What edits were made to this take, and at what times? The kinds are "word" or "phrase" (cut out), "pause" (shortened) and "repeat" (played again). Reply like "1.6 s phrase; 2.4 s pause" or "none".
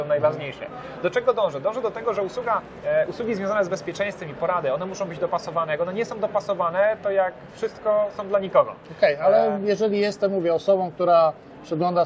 none